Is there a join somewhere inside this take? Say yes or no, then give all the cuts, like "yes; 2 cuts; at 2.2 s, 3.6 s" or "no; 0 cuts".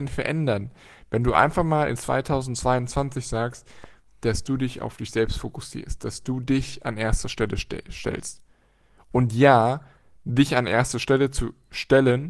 no; 0 cuts